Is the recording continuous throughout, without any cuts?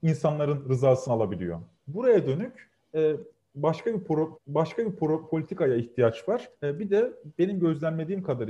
no; 3 cuts; at 1.7 s, 4.3 s, 6.5 s

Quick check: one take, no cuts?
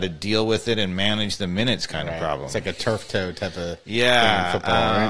yes; 0 cuts

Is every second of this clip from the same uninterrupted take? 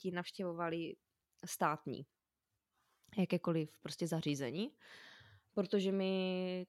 yes; 0 cuts

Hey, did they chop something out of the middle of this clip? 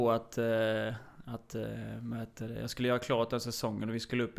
no; 0 cuts

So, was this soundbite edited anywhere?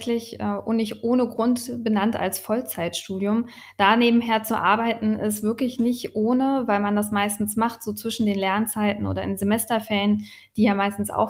no; 0 cuts

